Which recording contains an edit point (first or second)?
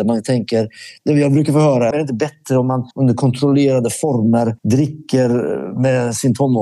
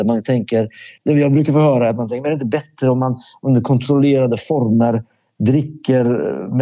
first